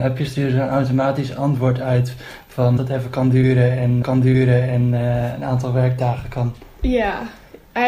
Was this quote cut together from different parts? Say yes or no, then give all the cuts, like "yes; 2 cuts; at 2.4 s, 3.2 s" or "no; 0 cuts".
yes; 2 cuts; at 2.8 s, 4.0 s